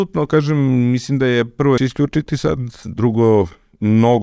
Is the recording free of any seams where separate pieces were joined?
no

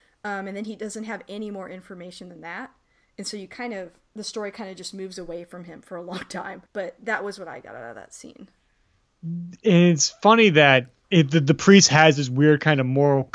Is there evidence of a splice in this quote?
yes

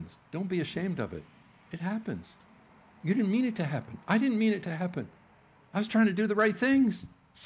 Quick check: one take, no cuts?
yes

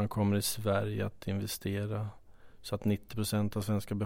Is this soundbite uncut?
yes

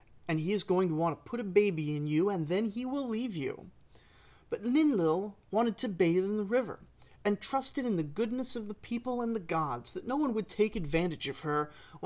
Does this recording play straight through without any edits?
yes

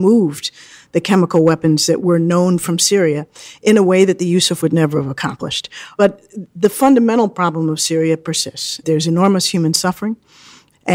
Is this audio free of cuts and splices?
no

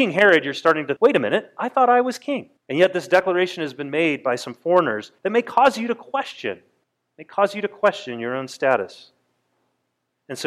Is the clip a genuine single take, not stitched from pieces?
no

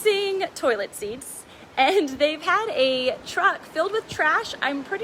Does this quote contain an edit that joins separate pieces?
no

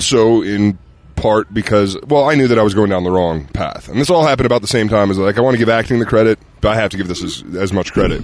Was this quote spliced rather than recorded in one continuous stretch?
yes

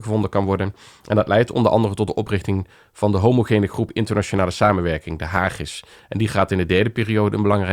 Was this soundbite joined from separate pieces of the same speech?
no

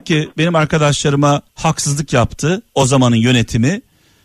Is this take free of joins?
no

